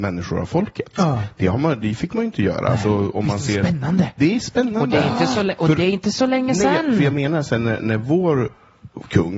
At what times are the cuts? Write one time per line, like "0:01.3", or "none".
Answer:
none